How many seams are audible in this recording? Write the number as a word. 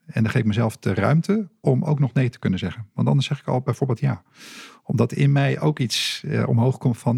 zero